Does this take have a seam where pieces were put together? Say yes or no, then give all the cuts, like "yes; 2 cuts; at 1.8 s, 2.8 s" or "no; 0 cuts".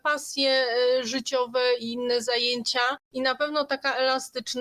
yes; 1 cut; at 3.0 s